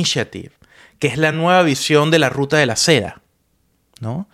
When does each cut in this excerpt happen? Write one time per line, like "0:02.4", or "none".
none